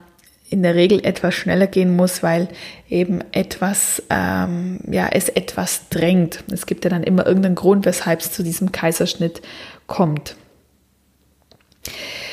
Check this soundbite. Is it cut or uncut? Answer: uncut